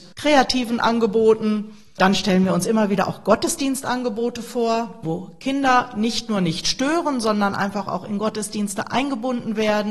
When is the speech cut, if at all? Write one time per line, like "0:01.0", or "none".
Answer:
none

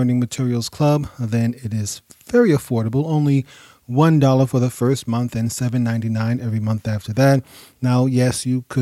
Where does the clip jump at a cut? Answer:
none

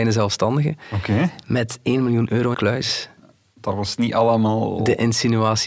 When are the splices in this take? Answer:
0:02.5

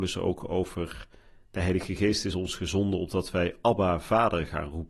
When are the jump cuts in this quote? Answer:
none

